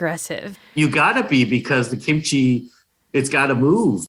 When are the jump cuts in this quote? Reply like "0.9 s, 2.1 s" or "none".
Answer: none